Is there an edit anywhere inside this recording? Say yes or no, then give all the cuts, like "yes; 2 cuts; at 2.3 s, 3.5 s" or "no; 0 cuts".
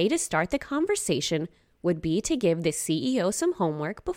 no; 0 cuts